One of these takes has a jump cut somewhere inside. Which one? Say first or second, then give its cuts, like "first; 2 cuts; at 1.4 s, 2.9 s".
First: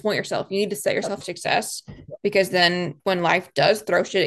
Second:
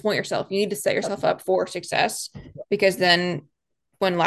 first; 2 cuts; at 1.2 s, 3.0 s